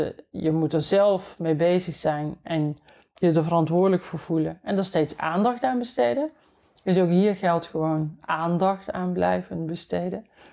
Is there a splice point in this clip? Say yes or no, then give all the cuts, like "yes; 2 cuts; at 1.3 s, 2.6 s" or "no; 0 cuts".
no; 0 cuts